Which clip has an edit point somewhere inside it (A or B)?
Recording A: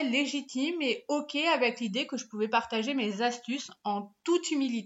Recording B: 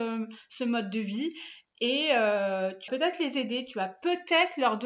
B